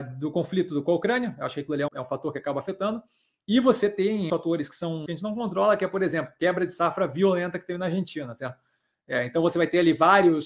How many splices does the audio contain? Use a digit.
3